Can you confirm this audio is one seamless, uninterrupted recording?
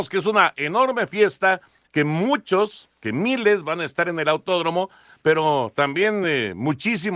yes; 0 cuts

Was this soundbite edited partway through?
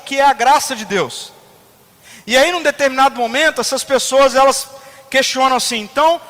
no; 0 cuts

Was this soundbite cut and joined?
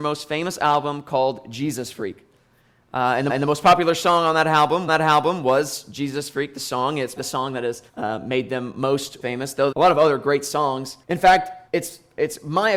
yes; 8 cuts; at 3.3 s, 4.9 s, 7.2 s, 7.9 s, 9.2 s, 9.7 s, 11.0 s, 11.7 s

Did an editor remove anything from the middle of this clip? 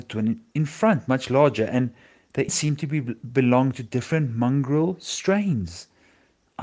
yes; 1 cut; at 2.5 s

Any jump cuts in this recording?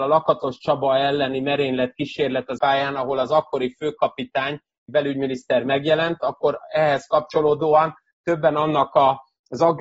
yes; 2 cuts; at 2.6 s, 4.9 s

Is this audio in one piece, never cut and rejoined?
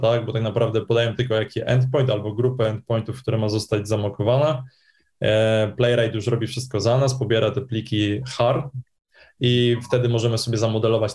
yes; 0 cuts

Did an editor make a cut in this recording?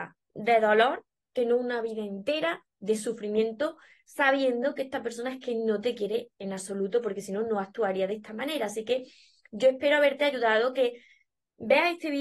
no; 0 cuts

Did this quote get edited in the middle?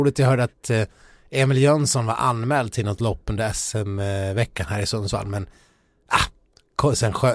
no; 0 cuts

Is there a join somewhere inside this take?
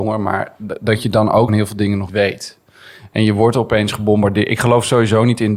yes; 2 cuts; at 1.5 s, 2.1 s

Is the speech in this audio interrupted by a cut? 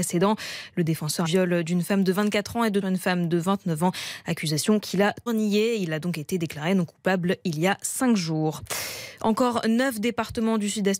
yes; 3 cuts; at 1.2 s, 2.8 s, 5.3 s

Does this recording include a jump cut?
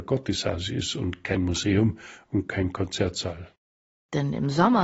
no; 0 cuts

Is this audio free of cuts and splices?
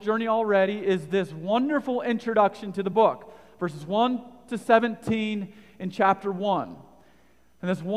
yes; 0 cuts

